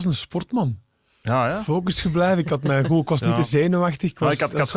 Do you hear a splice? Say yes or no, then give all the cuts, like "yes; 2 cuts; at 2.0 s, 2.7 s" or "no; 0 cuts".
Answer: no; 0 cuts